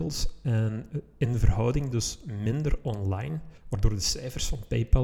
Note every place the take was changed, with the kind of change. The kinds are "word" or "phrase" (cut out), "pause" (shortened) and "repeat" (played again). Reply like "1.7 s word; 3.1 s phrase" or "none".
3.6 s pause